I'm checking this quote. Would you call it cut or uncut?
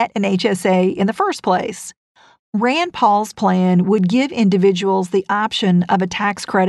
uncut